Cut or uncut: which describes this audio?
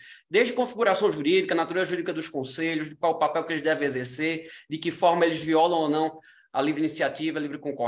uncut